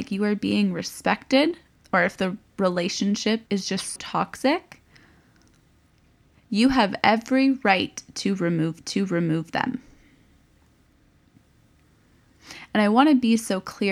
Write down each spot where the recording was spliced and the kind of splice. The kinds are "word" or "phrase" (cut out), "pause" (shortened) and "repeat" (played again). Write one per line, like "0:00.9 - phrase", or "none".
0:01.7 - pause
0:03.5 - pause
0:04.0 - word
0:08.8 - repeat